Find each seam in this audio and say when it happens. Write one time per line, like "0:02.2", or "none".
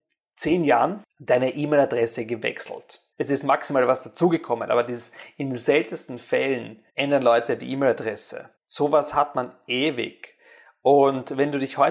0:03.1
0:06.9
0:08.6